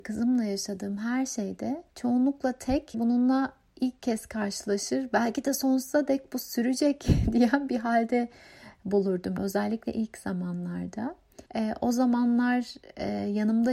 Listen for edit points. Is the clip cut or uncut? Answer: cut